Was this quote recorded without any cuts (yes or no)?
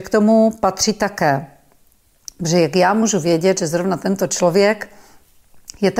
yes